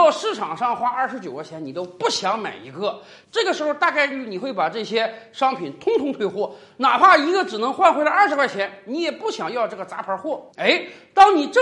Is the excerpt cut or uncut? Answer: cut